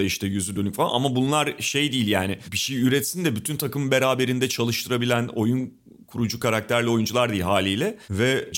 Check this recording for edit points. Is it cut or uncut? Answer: uncut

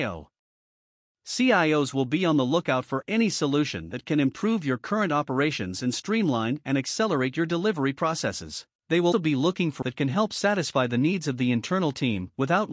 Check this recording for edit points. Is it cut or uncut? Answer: cut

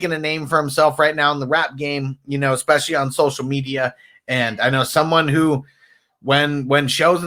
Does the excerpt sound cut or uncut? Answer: uncut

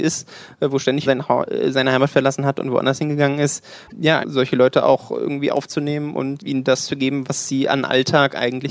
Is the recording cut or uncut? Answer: cut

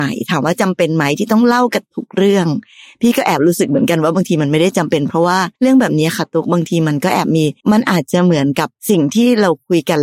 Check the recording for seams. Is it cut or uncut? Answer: cut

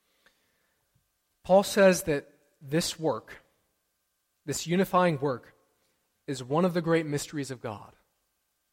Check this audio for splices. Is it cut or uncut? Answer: uncut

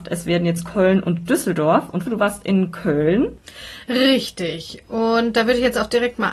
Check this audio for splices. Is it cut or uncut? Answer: cut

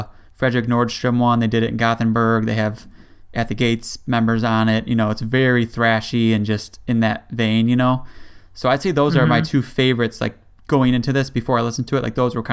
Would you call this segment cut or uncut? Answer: uncut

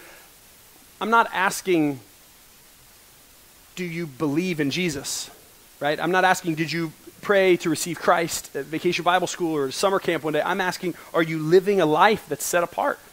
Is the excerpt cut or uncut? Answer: cut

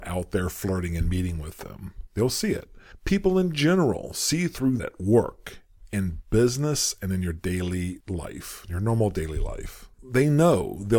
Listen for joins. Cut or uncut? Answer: cut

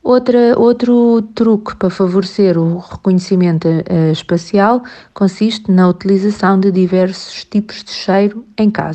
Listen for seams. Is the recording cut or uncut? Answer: uncut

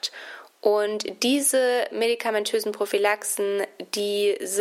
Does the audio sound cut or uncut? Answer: uncut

